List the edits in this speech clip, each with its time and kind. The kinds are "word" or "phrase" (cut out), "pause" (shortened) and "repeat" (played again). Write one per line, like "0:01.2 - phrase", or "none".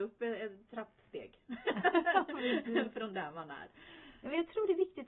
none

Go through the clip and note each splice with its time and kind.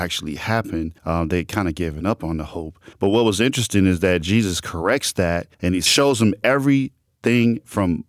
0:01.0 - pause
0:02.9 - pause
0:05.5 - pause

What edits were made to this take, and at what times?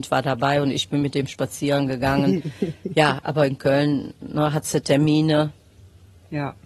none

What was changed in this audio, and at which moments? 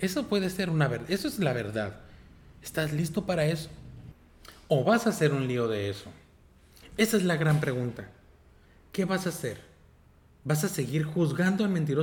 none

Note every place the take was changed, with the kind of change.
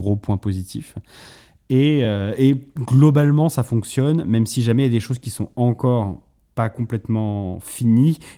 none

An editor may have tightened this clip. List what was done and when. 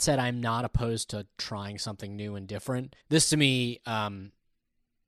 0:03.0 - pause

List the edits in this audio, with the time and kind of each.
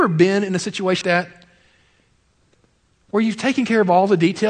0:01.0 - word

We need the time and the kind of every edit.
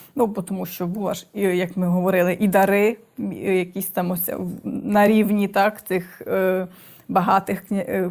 none

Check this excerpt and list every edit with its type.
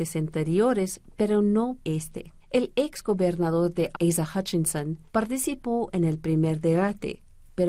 0:01.8 - word
0:02.4 - pause
0:03.9 - word
0:05.1 - pause

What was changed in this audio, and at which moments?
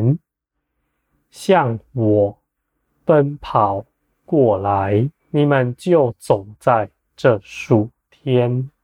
0:05.2 - pause

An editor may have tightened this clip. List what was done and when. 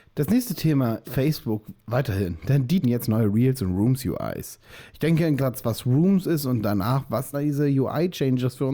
0:01.0 - word
0:02.8 - word
0:05.4 - phrase
0:07.3 - word

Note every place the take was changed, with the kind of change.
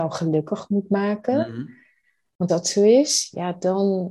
0:02.5 - word

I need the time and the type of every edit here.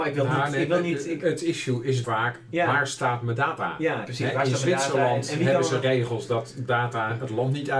0:02.0 - word
0:04.0 - word

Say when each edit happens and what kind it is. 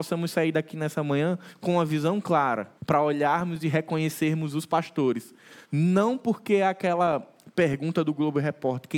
0:02.8 - pause
0:05.6 - pause

